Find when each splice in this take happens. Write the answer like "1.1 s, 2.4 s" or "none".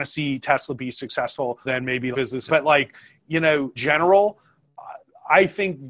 1.6 s, 2.1 s, 2.5 s, 3.8 s